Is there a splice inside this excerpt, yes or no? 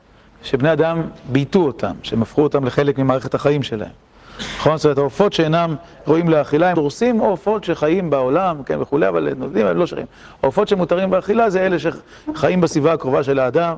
yes